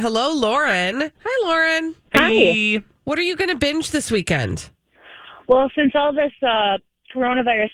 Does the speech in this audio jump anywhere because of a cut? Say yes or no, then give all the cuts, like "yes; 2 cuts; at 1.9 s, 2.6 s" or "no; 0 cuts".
yes; 2 cuts; at 1.2 s, 2.0 s